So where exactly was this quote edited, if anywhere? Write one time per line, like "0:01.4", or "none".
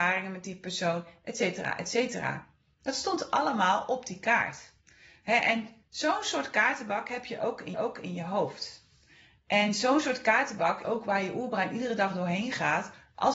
0:07.7
0:10.8